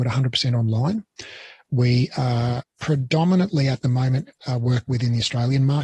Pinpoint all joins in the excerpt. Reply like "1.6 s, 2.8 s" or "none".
2.6 s, 4.3 s